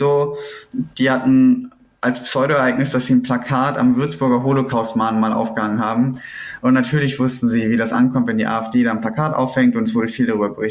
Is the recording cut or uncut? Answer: uncut